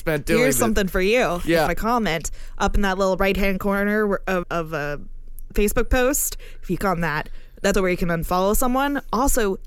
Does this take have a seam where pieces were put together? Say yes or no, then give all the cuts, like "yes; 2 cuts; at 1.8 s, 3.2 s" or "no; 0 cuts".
yes; 4 cuts; at 1.7 s, 4.4 s, 6.8 s, 7.7 s